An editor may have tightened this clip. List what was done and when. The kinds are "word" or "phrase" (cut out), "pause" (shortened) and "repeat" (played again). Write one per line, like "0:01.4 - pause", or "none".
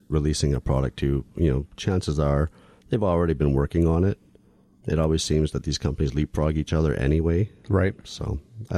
none